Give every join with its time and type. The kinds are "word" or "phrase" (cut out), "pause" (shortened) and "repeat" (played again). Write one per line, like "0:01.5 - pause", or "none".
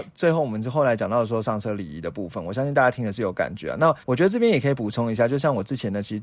0:04.0 - pause